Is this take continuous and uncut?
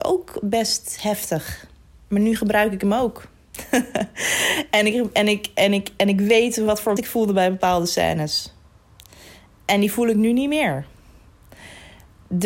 no; 1 cut; at 7.0 s

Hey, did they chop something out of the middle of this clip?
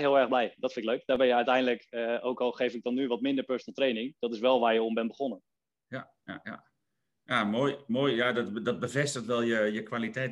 no; 0 cuts

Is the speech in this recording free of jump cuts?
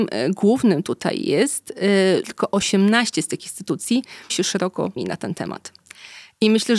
no; 3 cuts; at 2.2 s, 4.3 s, 5.0 s

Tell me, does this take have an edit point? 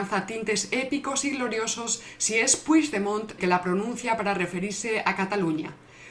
yes; 1 cut; at 3.4 s

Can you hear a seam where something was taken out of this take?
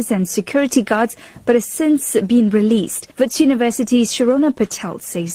yes; 1 cut; at 3.1 s

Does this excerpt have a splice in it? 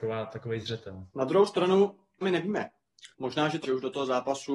yes; 4 cuts; at 1.1 s, 2.2 s, 3.1 s, 3.6 s

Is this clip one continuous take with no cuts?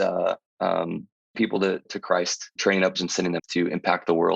no; 5 cuts; at 1.3 s, 1.8 s, 2.6 s, 2.9 s, 3.4 s

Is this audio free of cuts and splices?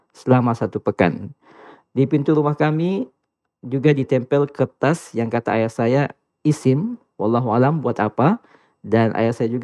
yes; 0 cuts

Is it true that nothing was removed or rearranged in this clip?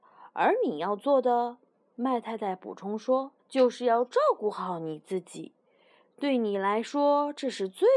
no; 1 cut; at 3.4 s

